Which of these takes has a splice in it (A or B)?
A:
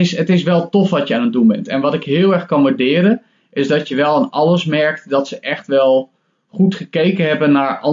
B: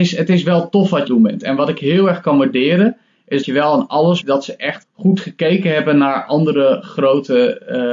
B